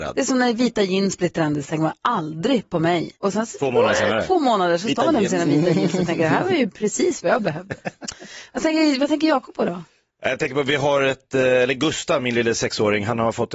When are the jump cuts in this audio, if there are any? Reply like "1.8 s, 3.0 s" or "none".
3.2 s